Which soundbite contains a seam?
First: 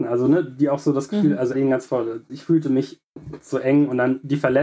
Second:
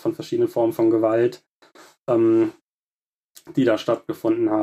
first; 1 cut; at 1.5 s

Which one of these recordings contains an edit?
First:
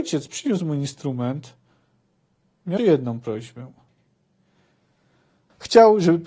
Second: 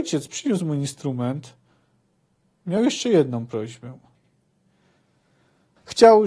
first; 1 cut; at 2.8 s

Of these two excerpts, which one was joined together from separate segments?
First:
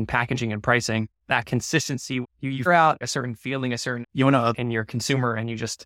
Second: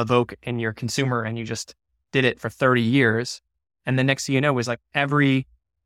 first; 6 cuts; at 1.2 s, 2.2 s, 2.7 s, 3.0 s, 4.0 s, 4.5 s

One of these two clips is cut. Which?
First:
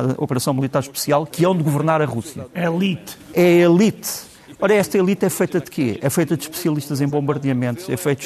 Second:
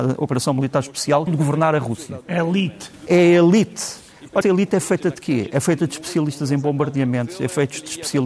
second; 2 cuts; at 1.3 s, 4.4 s

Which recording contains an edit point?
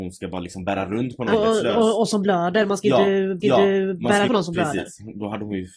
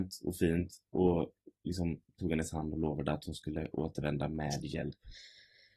first; 3 cuts; at 1.3 s, 3.4 s, 4.3 s

